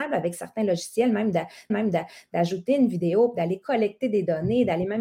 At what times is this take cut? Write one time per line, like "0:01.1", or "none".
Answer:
0:01.7